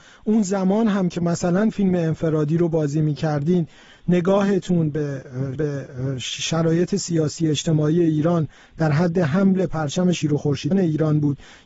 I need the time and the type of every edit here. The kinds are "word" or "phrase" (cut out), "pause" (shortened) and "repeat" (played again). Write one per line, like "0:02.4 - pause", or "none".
0:05.5 - repeat
0:10.7 - word